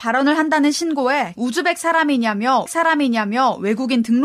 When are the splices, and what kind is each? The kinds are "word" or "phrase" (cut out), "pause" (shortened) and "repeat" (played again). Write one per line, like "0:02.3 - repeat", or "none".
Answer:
0:01.4 - word
0:02.7 - repeat